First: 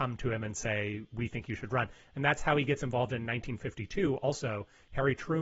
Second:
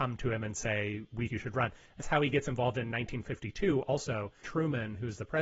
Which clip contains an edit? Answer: second; 3 cuts; at 1.3 s, 2.0 s, 4.4 s

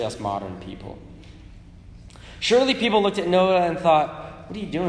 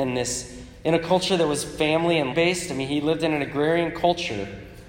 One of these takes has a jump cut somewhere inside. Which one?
second; 1 cut; at 2.3 s

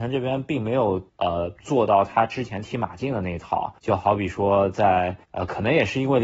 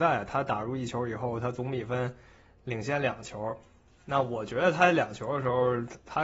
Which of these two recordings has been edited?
first; 3 cuts; at 1.6 s, 3.8 s, 5.2 s

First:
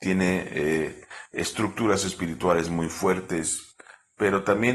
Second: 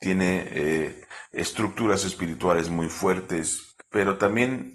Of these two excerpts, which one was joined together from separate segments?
second; 1 cut; at 3.8 s

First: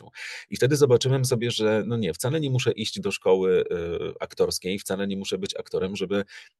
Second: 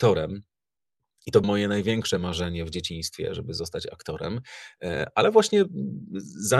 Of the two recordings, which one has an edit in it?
second; 1 cut; at 1.4 s

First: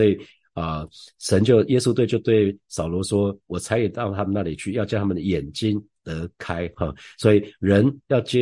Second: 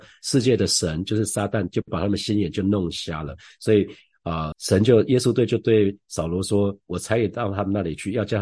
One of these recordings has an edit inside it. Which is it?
second; 1 cut; at 4.5 s

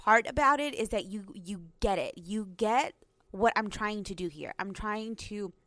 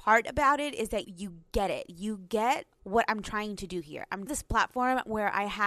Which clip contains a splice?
second; 3 cuts; at 1.0 s, 2.7 s, 4.3 s

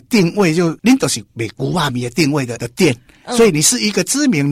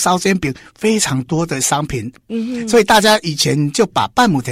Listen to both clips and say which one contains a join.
first; 1 cut; at 2.6 s

